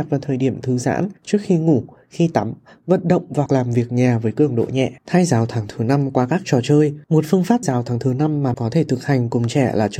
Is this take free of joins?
no; 6 cuts; at 1.2 s, 3.5 s, 5.0 s, 7.0 s, 7.6 s, 8.5 s

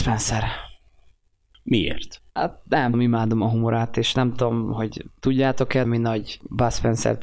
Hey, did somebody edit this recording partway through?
yes; 3 cuts; at 2.3 s, 2.9 s, 5.8 s

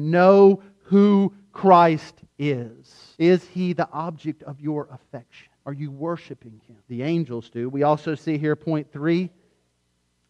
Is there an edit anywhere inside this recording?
yes; 3 cuts; at 3.1 s, 5.6 s, 6.8 s

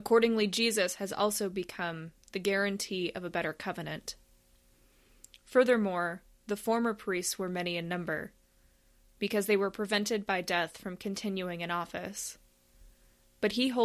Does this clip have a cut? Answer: no; 0 cuts

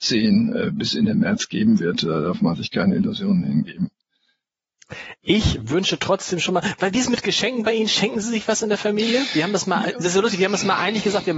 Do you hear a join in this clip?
no; 0 cuts

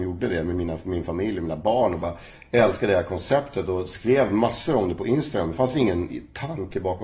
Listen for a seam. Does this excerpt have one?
no; 0 cuts

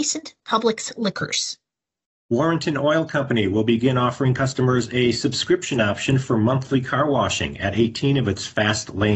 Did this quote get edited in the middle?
no; 0 cuts

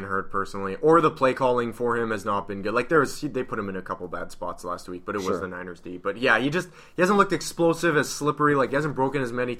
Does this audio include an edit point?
no; 0 cuts

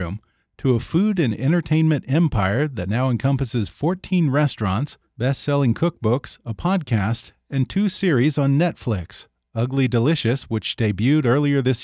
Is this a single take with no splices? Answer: yes; 0 cuts

